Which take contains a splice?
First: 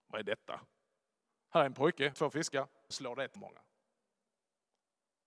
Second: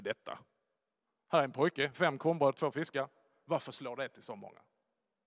first; 3 cuts; at 2.1 s, 2.9 s, 3.4 s

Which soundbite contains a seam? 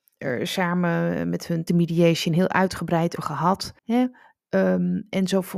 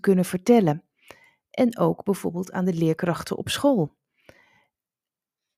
first; 3 cuts; at 1.7 s, 3.2 s, 3.8 s

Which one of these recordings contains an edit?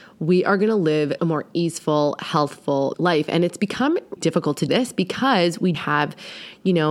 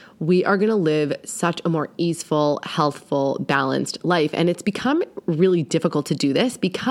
first; 5 cuts; at 1.2 s, 2.9 s, 4.2 s, 4.7 s, 5.7 s

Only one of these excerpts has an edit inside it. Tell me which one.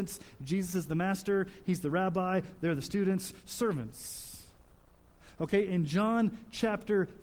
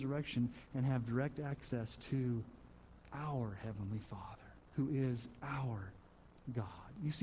second; 2 cuts; at 3.0 s, 4.7 s

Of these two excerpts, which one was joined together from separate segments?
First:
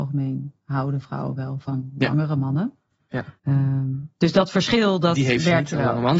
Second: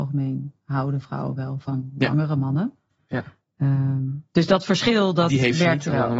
first; 1 cut; at 3.4 s

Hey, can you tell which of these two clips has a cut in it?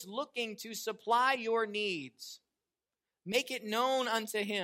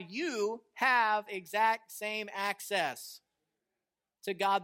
second; 1 cut; at 1.3 s

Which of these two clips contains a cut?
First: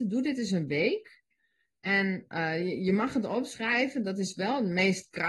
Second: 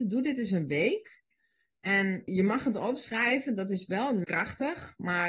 second; 2 cuts; at 2.3 s, 4.2 s

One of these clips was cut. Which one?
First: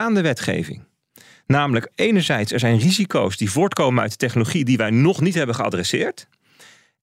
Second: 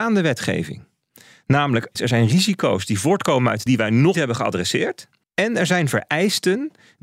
second; 4 cuts; at 1.9 s, 3.7 s, 4.1 s, 5.2 s

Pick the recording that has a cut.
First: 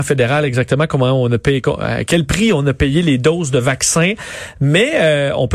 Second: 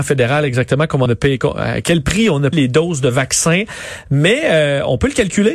second; 2 cuts; at 1.1 s, 2.5 s

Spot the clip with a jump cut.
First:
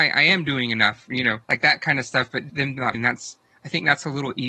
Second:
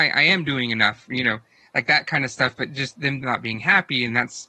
first; 3 cuts; at 1.4 s, 2.5 s, 2.9 s

